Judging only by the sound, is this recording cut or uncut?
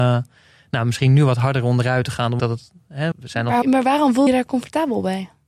cut